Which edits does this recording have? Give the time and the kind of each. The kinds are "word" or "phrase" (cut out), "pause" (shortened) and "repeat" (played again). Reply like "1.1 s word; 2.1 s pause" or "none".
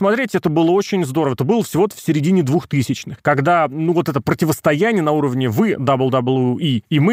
none